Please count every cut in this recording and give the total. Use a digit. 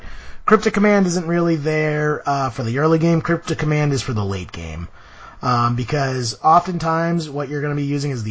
0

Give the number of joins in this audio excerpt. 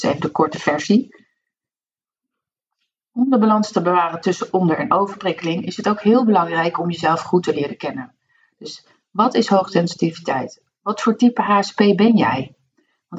0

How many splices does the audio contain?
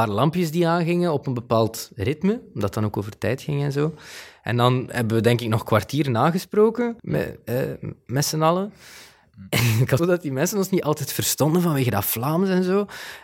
2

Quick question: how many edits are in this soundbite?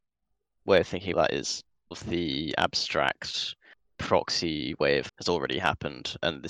3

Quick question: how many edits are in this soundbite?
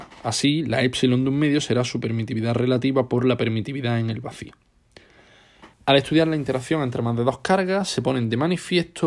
1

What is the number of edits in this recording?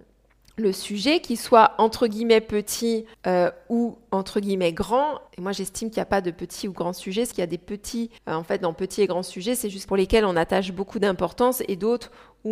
5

